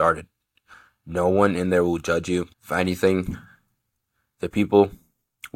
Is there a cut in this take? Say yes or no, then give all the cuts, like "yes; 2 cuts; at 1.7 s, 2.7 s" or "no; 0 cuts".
yes; 1 cut; at 2.5 s